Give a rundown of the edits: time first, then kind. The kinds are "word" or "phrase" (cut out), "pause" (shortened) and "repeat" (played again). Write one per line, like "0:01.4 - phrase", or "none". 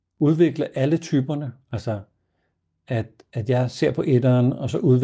none